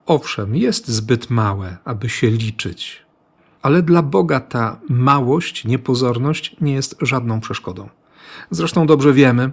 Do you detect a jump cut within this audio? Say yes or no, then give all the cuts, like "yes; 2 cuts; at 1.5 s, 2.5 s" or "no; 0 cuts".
no; 0 cuts